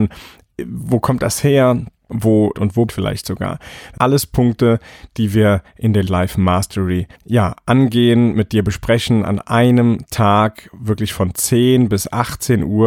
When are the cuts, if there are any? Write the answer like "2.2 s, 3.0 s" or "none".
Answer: 2.5 s, 2.9 s, 4.0 s, 6.1 s, 7.1 s